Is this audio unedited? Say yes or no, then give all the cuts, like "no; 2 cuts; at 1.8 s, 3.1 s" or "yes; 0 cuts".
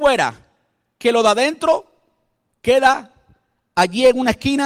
yes; 0 cuts